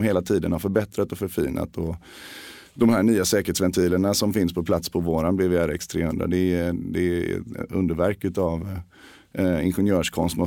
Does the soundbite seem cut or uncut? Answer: uncut